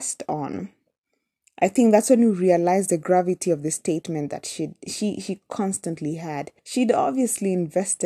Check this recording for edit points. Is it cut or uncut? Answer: cut